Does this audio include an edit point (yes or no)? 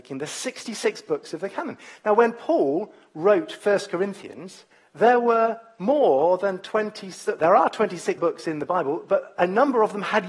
yes